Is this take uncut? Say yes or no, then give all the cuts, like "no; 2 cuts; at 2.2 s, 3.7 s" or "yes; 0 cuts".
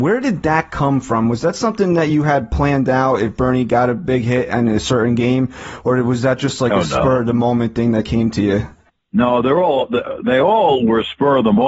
yes; 0 cuts